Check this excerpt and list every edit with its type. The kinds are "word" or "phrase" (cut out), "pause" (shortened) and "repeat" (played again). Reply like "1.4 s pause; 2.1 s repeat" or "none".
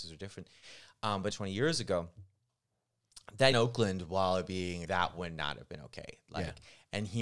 1.3 s word; 3.5 s word; 4.8 s word